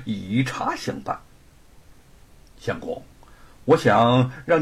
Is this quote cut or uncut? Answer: uncut